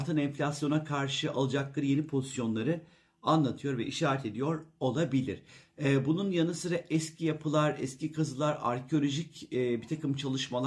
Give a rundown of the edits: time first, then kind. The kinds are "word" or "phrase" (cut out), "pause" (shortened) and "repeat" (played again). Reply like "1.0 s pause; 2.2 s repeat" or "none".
none